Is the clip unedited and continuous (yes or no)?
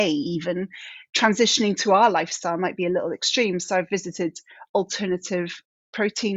yes